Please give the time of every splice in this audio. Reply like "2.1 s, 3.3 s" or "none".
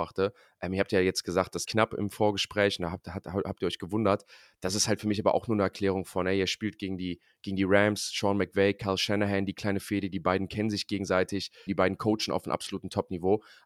1.6 s, 11.7 s